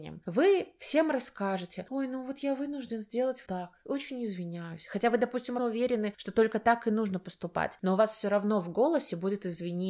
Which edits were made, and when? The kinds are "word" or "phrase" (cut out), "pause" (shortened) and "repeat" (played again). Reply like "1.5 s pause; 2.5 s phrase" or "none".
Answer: 3.5 s word; 5.6 s word